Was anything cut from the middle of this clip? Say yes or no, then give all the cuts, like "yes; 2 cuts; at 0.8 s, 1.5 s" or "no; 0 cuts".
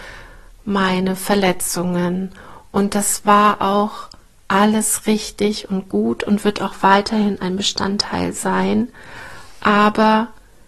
no; 0 cuts